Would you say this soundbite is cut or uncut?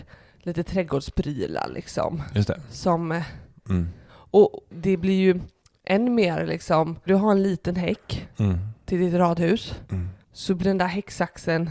cut